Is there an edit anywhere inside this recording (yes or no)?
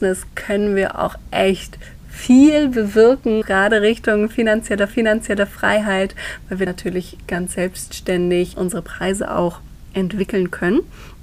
yes